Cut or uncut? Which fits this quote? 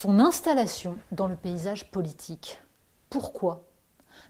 uncut